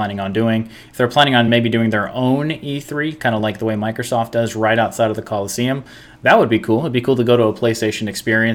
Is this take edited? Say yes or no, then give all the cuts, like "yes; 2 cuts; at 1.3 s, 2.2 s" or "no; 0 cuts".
no; 0 cuts